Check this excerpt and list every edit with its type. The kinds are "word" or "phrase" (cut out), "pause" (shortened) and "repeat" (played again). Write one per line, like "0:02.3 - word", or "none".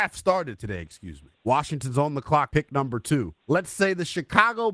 0:01.4 - pause
0:02.5 - word
0:03.4 - pause